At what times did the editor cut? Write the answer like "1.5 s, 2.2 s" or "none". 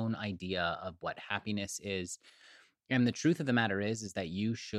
none